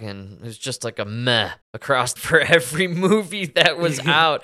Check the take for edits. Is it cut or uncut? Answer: cut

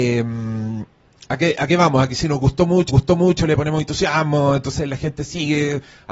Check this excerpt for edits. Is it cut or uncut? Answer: cut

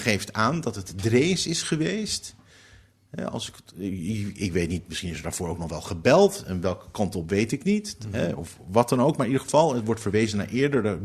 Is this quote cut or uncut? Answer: uncut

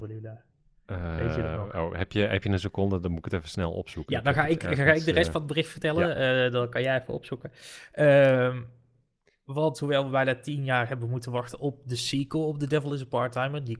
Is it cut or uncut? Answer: uncut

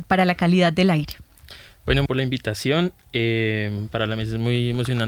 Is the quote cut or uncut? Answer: cut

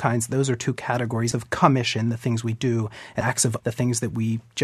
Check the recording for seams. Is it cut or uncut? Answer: cut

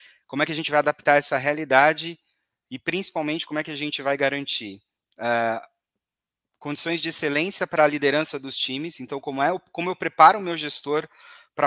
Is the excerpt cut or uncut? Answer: uncut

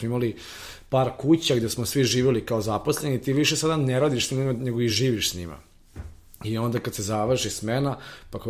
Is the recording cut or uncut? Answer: uncut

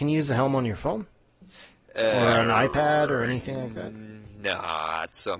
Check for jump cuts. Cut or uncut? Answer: uncut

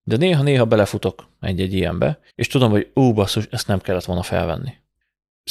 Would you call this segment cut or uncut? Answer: cut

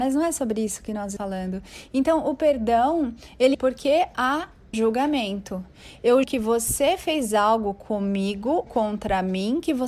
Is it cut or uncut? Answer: cut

